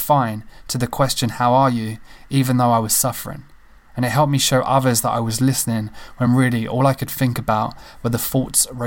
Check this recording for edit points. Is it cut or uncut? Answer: uncut